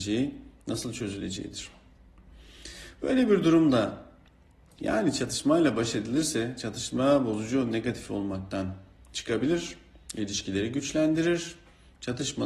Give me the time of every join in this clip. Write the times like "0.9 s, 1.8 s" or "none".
none